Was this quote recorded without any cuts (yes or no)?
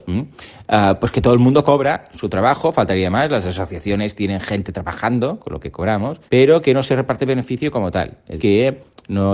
no